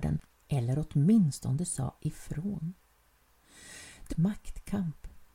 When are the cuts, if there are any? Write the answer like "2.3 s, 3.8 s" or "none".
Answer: 4.1 s

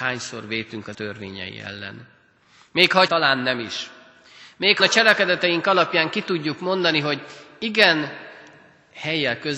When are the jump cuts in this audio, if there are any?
0.9 s, 3.1 s, 4.8 s

